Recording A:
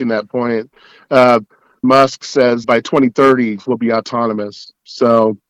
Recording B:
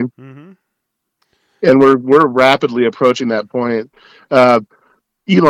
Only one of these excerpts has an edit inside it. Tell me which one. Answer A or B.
A